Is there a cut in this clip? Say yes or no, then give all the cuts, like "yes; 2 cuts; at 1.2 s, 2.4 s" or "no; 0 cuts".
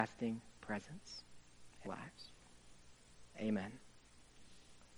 yes; 1 cut; at 1.9 s